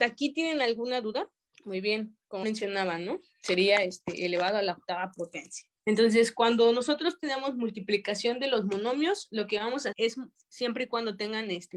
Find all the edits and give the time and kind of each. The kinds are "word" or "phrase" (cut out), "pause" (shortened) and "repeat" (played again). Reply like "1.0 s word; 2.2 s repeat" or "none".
1.5 s pause; 2.4 s word; 5.8 s pause; 9.9 s word; 10.4 s pause